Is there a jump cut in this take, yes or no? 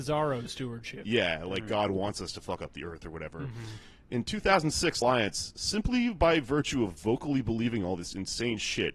yes